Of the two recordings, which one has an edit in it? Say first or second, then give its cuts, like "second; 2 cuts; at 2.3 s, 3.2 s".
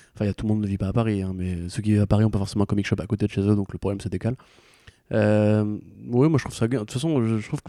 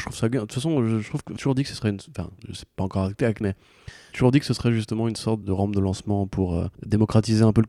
second; 6 cuts; at 1.4 s, 2.4 s, 3.4 s, 4.1 s, 5.4 s, 6.7 s